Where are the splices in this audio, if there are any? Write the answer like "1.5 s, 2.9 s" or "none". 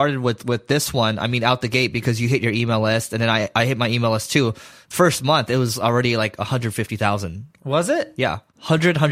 none